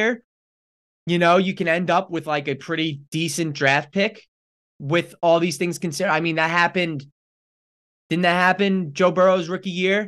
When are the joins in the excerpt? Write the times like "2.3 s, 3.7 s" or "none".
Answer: none